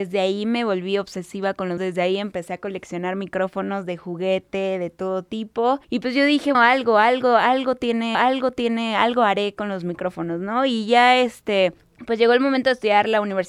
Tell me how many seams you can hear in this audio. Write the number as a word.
five